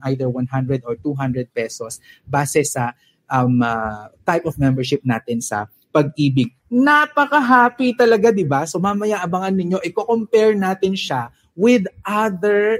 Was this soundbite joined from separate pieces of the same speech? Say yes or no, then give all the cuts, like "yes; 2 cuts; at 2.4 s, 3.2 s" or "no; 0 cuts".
no; 0 cuts